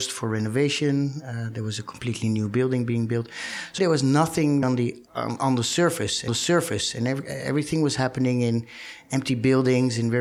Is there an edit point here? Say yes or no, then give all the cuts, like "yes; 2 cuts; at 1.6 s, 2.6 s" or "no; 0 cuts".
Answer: yes; 4 cuts; at 3.8 s, 4.6 s, 5.1 s, 6.3 s